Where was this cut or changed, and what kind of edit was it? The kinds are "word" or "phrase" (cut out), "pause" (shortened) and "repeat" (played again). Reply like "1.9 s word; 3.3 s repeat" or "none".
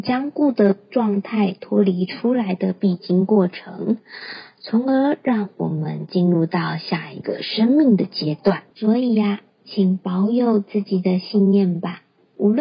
8.7 s pause; 9.5 s pause